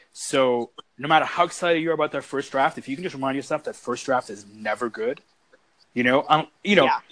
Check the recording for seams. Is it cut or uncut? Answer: uncut